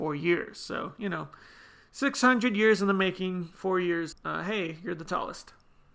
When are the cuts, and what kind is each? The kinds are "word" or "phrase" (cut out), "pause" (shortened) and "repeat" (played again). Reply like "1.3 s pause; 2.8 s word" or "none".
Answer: 4.1 s word

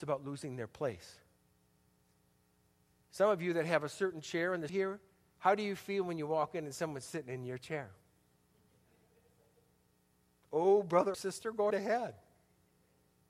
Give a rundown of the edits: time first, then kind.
4.7 s word; 11.1 s word; 11.7 s word

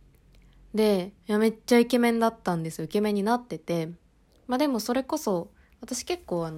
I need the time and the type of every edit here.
1.2 s pause; 4.3 s pause

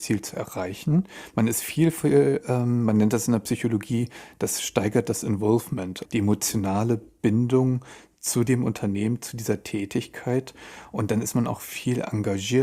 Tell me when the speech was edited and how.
6.0 s word

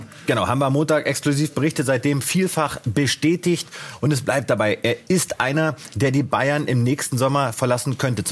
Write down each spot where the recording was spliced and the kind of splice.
none

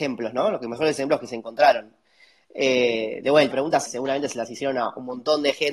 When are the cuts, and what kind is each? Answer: 3.5 s word; 3.9 s word

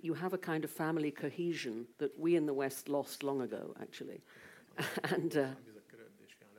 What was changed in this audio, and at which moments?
1.9 s pause

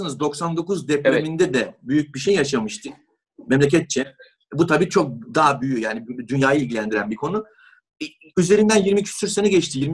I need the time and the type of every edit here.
none

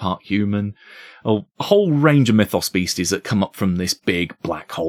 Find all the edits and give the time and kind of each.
1.5 s pause

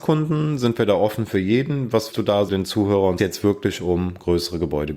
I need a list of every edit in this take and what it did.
2.1 s word; 2.5 s word; 3.2 s phrase

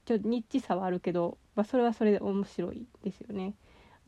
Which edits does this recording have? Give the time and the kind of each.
1.5 s pause

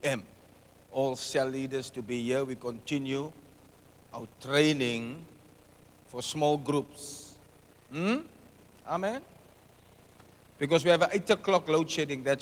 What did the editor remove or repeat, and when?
none

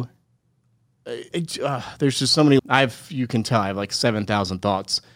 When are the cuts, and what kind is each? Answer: 1.3 s word; 2.6 s word

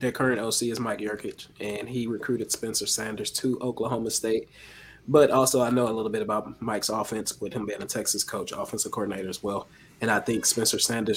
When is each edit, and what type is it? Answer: none

